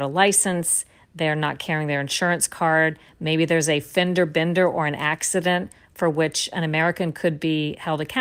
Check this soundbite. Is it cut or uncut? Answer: uncut